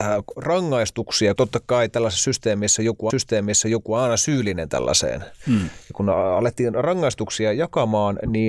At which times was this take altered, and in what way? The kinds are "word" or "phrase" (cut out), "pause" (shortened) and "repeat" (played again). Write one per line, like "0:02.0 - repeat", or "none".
0:01.4 - word
0:03.1 - repeat